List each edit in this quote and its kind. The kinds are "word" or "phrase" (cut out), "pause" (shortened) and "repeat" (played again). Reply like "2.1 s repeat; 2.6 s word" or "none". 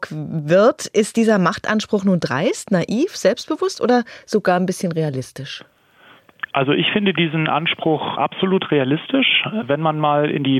none